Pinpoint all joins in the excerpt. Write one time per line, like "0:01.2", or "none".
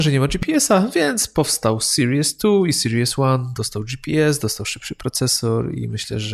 none